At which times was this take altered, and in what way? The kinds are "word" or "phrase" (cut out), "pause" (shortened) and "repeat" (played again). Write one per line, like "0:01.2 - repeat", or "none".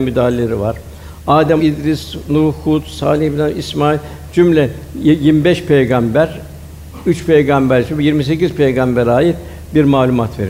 0:01.6 - word

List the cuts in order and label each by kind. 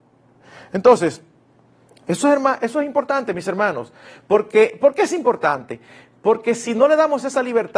none

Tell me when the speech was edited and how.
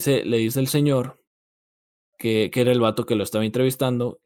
none

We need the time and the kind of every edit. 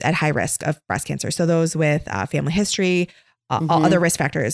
none

